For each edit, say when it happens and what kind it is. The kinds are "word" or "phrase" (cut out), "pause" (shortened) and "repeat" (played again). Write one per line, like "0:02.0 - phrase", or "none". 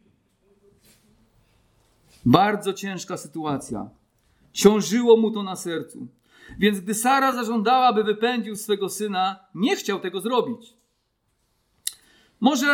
none